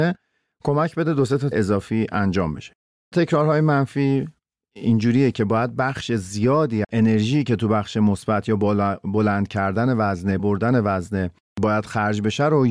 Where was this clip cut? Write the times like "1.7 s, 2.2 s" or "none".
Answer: 1.5 s, 3.1 s, 6.8 s, 10.4 s